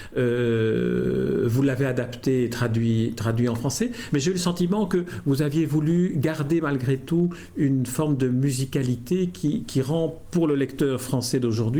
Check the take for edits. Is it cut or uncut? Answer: uncut